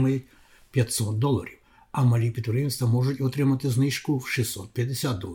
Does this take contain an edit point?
no; 0 cuts

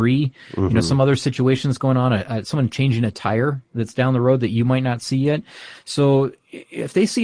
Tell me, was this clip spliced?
no; 0 cuts

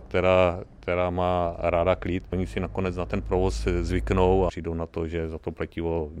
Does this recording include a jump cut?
yes; 1 cut; at 4.5 s

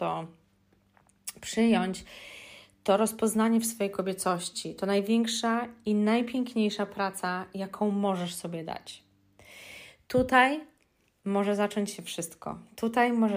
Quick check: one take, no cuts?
yes; 0 cuts

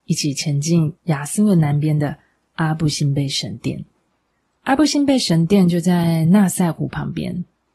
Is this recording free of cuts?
no; 2 cuts; at 1.0 s, 4.1 s

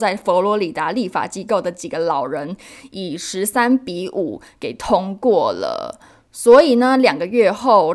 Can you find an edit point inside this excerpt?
no; 0 cuts

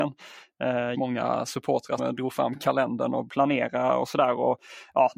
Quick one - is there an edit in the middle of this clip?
yes; 3 cuts; at 0.9 s, 2.0 s, 3.3 s

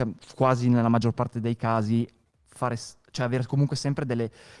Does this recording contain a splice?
no; 0 cuts

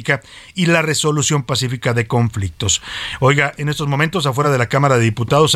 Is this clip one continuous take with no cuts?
yes; 0 cuts

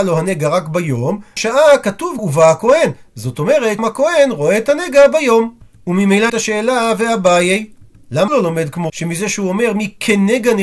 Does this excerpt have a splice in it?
yes; 6 cuts; at 1.4 s, 2.2 s, 3.8 s, 6.3 s, 8.3 s, 8.9 s

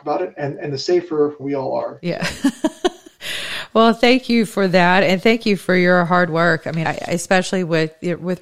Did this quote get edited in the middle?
yes; 2 cuts; at 1.4 s, 6.8 s

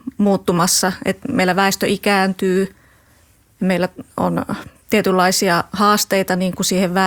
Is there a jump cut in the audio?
no; 0 cuts

